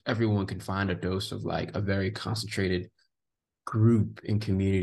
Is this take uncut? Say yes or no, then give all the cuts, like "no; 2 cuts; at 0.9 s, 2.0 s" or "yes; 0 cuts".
yes; 0 cuts